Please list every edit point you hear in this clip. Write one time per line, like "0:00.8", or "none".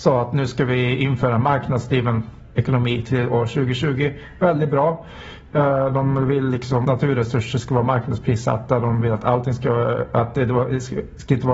0:06.8

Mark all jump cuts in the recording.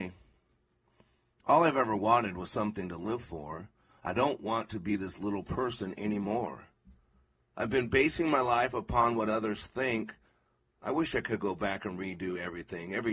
none

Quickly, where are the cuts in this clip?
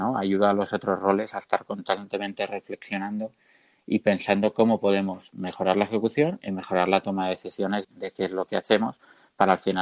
0:07.8

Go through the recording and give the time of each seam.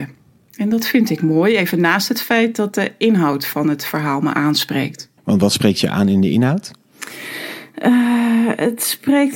0:05.2

